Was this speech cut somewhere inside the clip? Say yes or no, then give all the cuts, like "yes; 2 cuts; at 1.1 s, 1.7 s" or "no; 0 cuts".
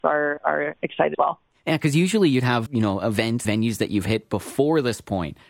yes; 3 cuts; at 1.1 s, 2.7 s, 3.4 s